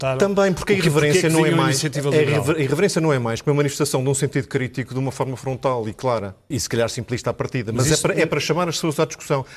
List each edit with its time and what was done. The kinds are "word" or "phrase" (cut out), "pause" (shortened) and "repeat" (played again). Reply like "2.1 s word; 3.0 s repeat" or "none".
6.5 s word

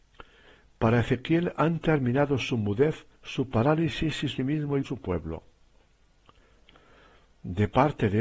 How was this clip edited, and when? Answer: 3.1 s pause; 4.4 s phrase; 4.8 s word

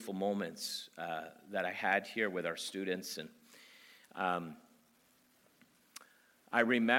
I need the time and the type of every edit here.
none

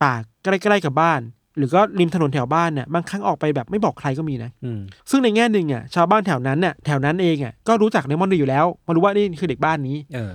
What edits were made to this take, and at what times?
1.4 s pause; 5.0 s pause

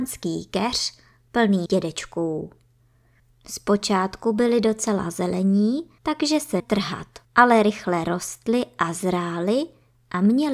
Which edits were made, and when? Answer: 1.7 s word; 6.0 s pause; 6.6 s word; 7.2 s pause

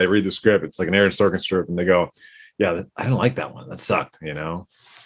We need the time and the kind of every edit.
none

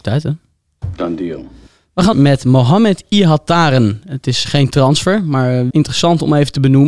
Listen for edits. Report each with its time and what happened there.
2.1 s word; 4.4 s word; 5.7 s word

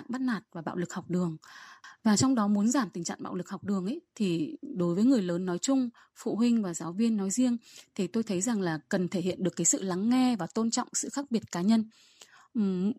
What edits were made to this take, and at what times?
none

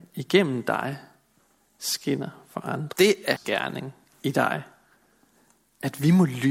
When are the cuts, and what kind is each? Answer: 2.9 s word; 3.4 s word

